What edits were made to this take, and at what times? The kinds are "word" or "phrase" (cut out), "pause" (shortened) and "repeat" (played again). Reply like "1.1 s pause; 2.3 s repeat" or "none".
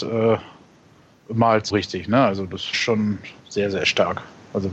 1.7 s phrase; 2.7 s word; 3.4 s pause